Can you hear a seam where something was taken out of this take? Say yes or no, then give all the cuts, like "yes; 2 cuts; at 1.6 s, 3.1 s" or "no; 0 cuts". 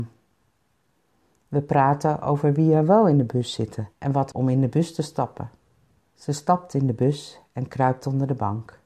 yes; 3 cuts; at 3.9 s, 4.3 s, 6.0 s